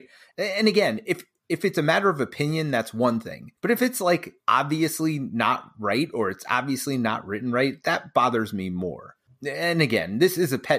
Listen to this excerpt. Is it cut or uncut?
cut